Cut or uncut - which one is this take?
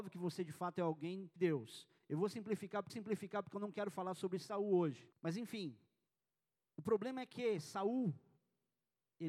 cut